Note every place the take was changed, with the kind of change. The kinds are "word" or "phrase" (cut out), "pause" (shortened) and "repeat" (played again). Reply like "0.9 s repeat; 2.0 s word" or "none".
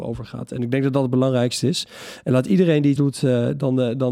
3.0 s word